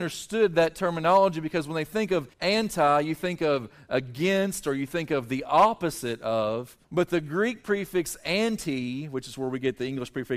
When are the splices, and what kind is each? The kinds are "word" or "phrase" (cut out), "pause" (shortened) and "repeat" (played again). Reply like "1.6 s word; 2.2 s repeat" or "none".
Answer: 2.3 s pause; 6.8 s pause